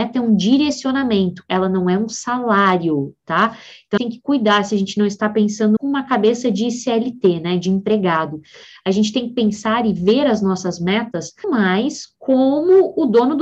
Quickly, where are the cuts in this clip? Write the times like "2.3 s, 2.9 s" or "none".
4.0 s, 5.8 s, 11.4 s

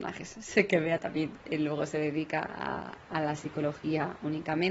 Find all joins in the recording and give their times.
none

